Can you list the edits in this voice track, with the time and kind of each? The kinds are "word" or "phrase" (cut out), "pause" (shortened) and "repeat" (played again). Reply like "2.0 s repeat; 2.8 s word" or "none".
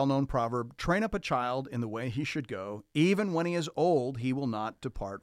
none